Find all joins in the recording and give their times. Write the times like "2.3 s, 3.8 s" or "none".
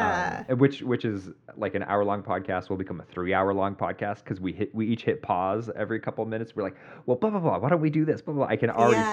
none